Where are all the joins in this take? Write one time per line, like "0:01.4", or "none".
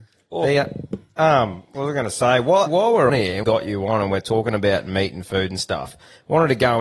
0:02.7
0:03.1
0:03.4